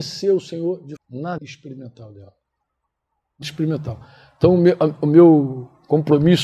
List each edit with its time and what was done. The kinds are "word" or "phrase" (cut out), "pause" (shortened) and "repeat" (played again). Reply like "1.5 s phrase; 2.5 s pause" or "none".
1.0 s word; 1.4 s word; 3.4 s word